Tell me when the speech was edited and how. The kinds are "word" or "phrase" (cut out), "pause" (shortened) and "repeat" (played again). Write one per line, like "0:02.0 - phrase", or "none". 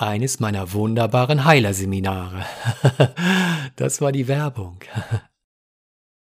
none